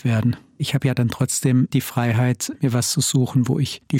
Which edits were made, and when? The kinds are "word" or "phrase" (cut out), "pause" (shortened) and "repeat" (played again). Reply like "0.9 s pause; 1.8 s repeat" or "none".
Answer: none